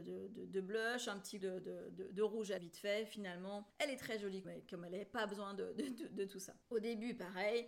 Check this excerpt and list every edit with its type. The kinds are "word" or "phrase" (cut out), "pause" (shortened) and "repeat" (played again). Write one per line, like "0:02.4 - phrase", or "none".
0:01.4 - word
0:02.6 - word
0:03.7 - pause
0:04.4 - word
0:06.6 - pause